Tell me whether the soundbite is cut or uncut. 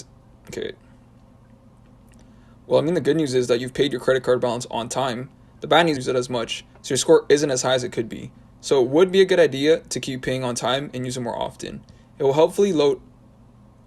cut